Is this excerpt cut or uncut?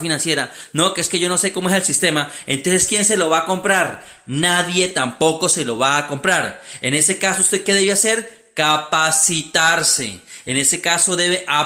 uncut